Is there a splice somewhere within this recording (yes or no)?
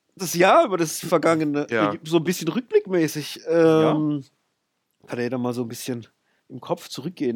no